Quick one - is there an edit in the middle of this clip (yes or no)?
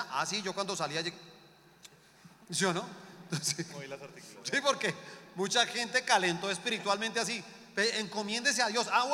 no